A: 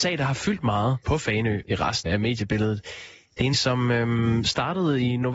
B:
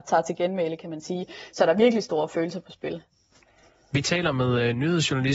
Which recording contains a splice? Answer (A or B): A